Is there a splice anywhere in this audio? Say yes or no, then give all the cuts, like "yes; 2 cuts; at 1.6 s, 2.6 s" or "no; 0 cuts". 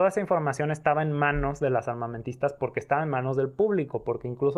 no; 0 cuts